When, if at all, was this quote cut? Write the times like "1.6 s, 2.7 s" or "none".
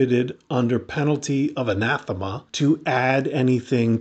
2.5 s